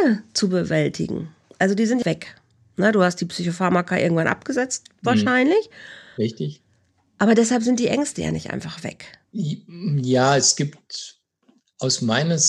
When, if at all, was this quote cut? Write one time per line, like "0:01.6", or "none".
0:02.0
0:09.2